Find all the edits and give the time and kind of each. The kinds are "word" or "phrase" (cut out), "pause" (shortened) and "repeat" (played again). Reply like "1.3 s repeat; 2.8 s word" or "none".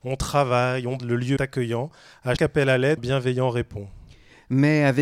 1.0 s word; 1.4 s word; 2.4 s word; 3.0 s word